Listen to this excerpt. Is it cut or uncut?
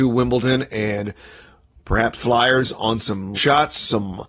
cut